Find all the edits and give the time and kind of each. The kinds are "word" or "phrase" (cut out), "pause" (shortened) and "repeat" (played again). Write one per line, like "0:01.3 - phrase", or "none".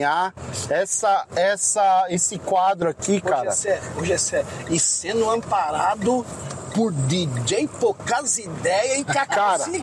none